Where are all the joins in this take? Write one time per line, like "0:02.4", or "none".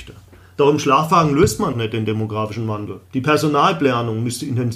0:01.7
0:03.1